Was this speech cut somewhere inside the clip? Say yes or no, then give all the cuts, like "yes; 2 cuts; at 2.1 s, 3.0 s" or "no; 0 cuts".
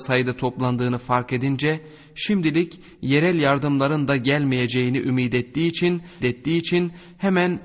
yes; 1 cut; at 6.2 s